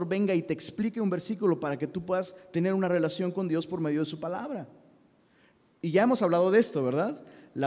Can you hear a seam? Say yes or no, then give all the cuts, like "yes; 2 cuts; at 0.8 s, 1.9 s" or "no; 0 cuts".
no; 0 cuts